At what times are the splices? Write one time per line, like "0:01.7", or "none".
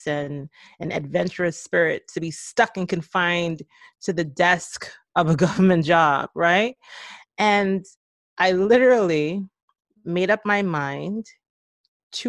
none